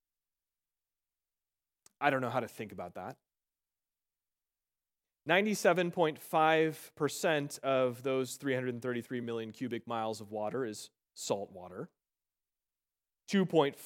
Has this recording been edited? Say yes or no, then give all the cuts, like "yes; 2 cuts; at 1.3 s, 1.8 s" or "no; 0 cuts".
no; 0 cuts